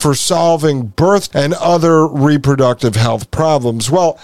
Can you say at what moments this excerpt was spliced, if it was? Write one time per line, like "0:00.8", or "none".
0:01.3